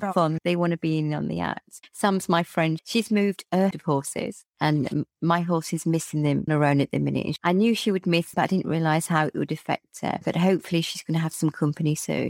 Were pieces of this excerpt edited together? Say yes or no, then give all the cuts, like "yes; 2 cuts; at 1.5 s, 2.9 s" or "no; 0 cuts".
yes; 3 cuts; at 3.7 s, 6.5 s, 8.3 s